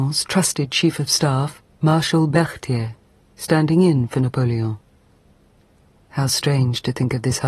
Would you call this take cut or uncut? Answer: uncut